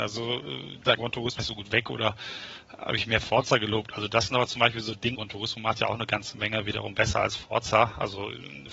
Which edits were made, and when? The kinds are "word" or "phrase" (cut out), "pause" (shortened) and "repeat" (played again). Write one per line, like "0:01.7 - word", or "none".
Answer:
0:01.0 - word
0:01.4 - phrase
0:05.1 - word